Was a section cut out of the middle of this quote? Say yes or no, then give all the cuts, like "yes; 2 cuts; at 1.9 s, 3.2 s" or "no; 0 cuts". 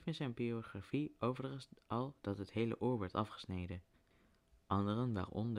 no; 0 cuts